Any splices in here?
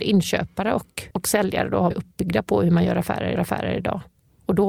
yes; 3 cuts; at 1.1 s, 1.9 s, 3.4 s

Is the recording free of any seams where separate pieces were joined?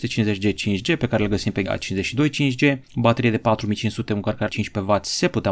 no; 3 cuts; at 1.7 s, 2.8 s, 4.5 s

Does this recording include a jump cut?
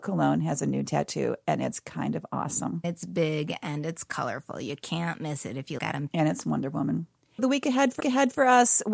yes; 5 cuts; at 2.8 s, 5.8 s, 6.1 s, 7.4 s, 8.0 s

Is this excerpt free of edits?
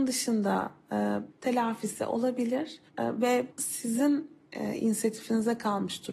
no; 3 cuts; at 1.3 s, 2.9 s, 3.5 s

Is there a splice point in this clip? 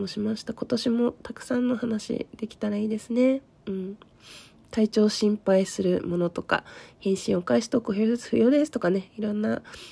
no; 0 cuts

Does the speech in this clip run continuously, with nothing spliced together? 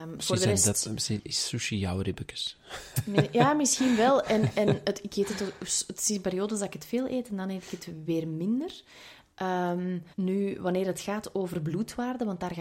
no; 1 cut; at 10.1 s

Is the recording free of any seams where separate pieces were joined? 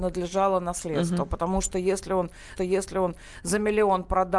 no; 1 cut; at 2.6 s

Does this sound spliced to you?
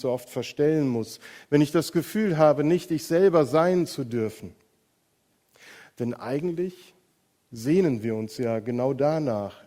no; 0 cuts

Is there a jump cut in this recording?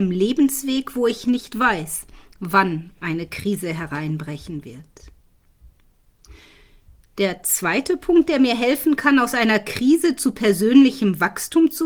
no; 0 cuts

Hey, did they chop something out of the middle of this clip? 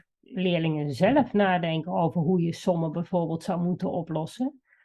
no; 0 cuts

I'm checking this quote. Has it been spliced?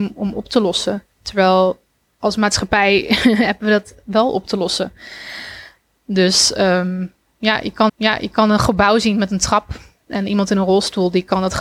yes; 2 cuts; at 1.1 s, 7.9 s

